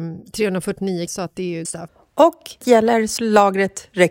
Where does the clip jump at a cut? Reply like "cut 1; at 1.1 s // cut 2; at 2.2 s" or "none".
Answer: cut 1; at 1.1 s // cut 2; at 1.6 s // cut 3; at 2.6 s // cut 4; at 3.2 s